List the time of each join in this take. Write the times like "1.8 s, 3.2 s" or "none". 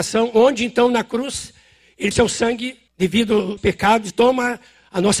2.1 s, 2.9 s, 3.6 s, 4.1 s